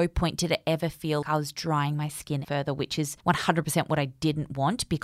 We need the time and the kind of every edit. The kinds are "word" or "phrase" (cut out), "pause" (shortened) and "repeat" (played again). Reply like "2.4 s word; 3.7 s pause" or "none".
1.2 s word; 2.4 s word; 3.2 s pause